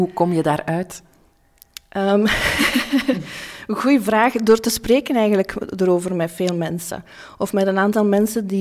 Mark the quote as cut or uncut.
uncut